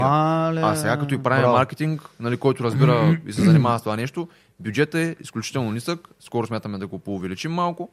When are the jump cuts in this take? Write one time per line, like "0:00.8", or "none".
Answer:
none